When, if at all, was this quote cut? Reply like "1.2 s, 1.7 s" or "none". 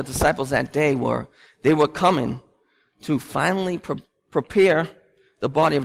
none